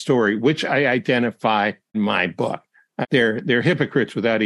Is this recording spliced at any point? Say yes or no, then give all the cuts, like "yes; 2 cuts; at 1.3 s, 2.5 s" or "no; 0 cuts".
yes; 2 cuts; at 1.9 s, 3.0 s